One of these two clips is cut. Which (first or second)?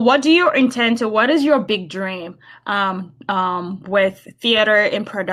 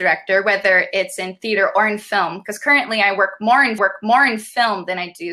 second